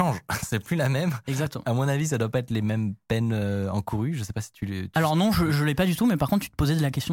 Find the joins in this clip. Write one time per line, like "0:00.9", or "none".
none